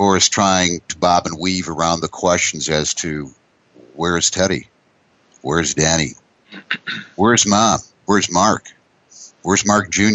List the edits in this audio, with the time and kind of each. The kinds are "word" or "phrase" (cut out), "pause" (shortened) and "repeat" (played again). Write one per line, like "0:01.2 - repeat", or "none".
none